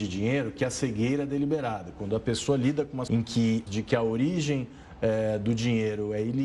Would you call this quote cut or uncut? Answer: cut